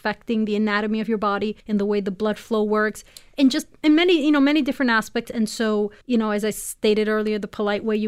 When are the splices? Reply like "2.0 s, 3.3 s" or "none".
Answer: 1.6 s, 6.0 s